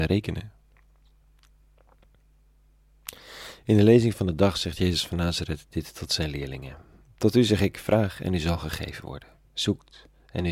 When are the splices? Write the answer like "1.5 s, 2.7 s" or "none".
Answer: none

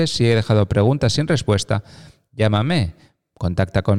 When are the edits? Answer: none

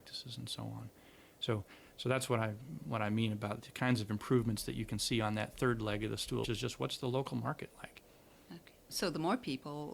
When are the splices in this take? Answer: 3.6 s, 6.4 s

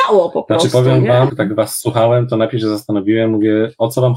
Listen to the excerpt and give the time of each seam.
1.3 s

